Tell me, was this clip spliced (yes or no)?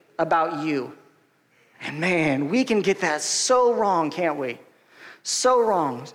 no